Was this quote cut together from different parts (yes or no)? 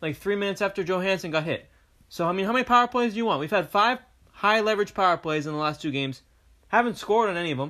no